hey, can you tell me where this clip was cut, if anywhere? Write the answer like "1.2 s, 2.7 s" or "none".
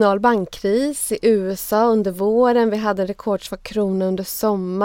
none